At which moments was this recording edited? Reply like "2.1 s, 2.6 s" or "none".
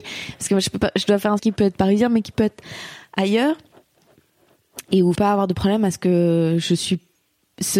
1.4 s, 5.1 s

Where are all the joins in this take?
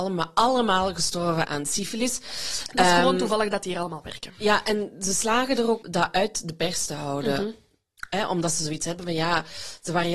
1.4 s, 5.8 s

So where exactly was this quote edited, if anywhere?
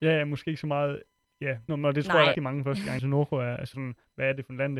1.7 s, 2.3 s, 3.0 s, 3.7 s

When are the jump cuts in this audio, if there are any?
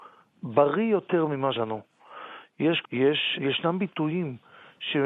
1.5 s, 2.8 s, 3.3 s

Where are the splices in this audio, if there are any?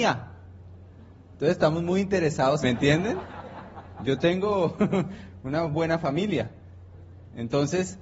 2.6 s

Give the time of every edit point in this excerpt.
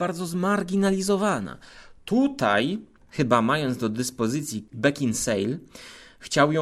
3.0 s, 4.7 s

